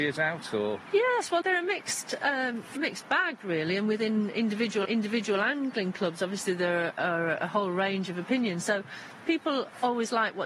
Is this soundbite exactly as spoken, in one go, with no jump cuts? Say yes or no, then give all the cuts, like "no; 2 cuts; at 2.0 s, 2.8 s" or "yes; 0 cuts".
no; 3 cuts; at 1.4 s, 2.8 s, 4.8 s